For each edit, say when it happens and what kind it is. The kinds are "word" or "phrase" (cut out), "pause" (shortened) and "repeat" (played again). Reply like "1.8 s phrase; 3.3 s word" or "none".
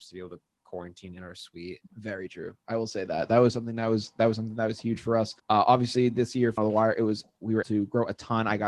1.9 s pause; 5.4 s pause; 6.6 s phrase; 7.6 s word

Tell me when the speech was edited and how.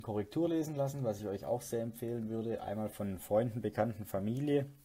none

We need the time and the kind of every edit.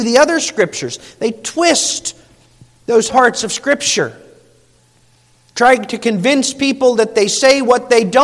3.1 s word

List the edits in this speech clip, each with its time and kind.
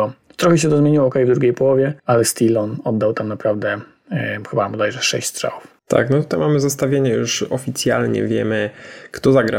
2.0 s pause; 5.8 s pause

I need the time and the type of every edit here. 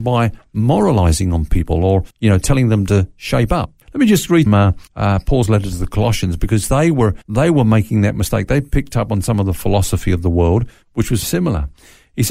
2.1 s pause; 3.8 s pause; 4.5 s phrase; 4.9 s pause; 7.2 s pause; 11.2 s word

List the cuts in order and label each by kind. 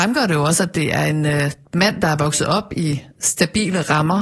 none

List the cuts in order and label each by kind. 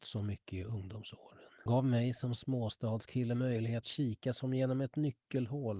1.7 s word; 3.8 s word

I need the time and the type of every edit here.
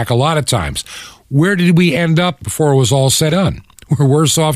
2.4 s word; 3.3 s word

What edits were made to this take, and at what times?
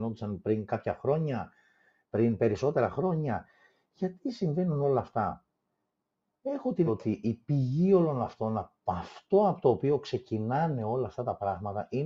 6.9 s word

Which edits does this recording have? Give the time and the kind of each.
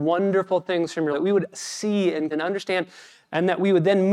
1.1 s word; 2.3 s word

